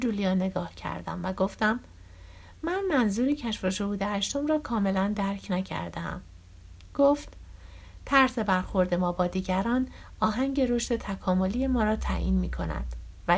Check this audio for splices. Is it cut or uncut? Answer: uncut